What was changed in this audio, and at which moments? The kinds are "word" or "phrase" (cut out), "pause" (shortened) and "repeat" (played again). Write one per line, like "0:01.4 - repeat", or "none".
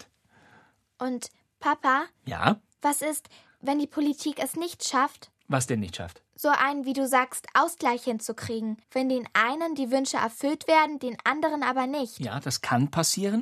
0:05.4 - pause
0:06.3 - pause
0:08.8 - pause